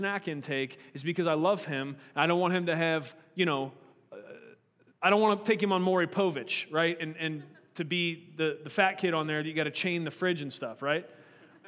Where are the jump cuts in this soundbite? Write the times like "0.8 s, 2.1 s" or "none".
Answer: none